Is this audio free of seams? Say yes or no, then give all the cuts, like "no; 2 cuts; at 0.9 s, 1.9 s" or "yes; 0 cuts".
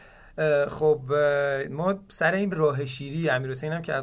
no; 1 cut; at 2.5 s